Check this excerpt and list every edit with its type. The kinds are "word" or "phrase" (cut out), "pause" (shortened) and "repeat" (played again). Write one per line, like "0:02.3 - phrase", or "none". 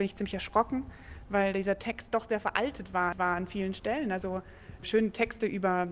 0:03.1 - repeat
0:04.2 - phrase
0:04.8 - word